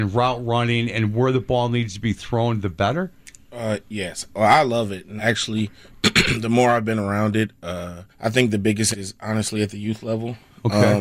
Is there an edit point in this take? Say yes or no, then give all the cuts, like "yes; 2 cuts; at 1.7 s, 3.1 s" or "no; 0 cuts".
yes; 3 cuts; at 5.2 s, 8.1 s, 8.9 s